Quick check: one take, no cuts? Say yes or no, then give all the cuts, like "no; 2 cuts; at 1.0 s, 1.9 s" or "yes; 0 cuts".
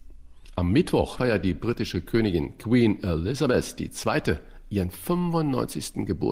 yes; 0 cuts